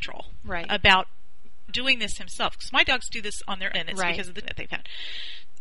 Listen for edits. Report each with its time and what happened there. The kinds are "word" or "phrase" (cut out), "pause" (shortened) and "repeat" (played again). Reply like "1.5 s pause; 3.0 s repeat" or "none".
1.7 s word; 3.7 s word; 4.4 s word